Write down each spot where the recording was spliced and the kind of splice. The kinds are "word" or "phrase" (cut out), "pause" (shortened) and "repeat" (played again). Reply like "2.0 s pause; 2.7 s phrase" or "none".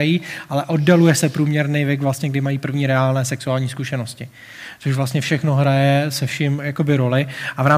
none